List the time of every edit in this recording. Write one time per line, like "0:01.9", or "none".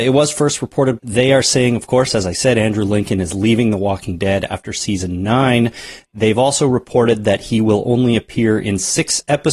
0:01.0